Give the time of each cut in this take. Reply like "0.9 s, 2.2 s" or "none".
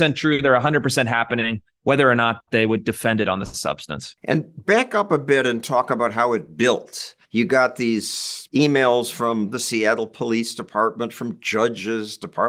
7.2 s, 8.5 s